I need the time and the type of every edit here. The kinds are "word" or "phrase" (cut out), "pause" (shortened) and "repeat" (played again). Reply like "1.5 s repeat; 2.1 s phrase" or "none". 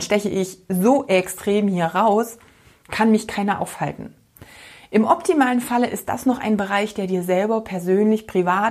none